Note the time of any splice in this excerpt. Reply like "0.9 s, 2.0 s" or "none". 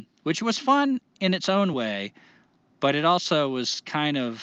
none